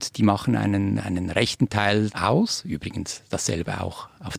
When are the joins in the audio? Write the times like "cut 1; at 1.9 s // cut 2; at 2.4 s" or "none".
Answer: cut 1; at 1.0 s // cut 2; at 2.1 s